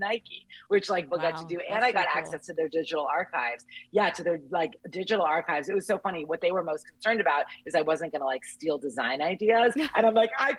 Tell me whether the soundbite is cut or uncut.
cut